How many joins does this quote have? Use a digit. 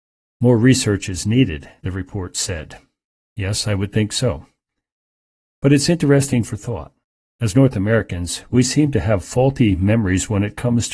1